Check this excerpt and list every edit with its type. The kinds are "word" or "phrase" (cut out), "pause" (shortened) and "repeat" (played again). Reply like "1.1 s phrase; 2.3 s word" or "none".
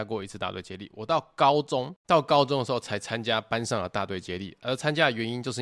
2.0 s pause